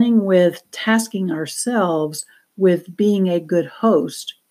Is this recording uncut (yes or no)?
yes